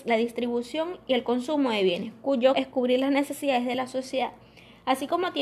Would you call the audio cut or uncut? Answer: cut